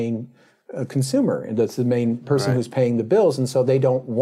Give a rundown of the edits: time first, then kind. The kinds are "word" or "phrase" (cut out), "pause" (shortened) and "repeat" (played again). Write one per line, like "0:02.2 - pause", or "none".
none